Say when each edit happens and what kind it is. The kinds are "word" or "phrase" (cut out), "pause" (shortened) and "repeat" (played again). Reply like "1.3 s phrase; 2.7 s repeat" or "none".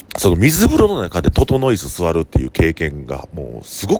none